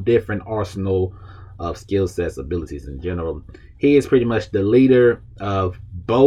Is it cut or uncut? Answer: uncut